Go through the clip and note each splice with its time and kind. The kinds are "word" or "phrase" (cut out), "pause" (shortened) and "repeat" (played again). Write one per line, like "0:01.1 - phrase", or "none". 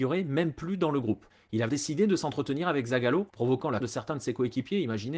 0:01.3 - pause
0:01.7 - word
0:03.3 - pause
0:03.8 - word